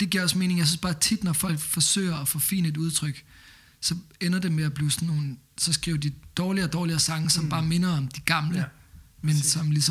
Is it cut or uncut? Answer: uncut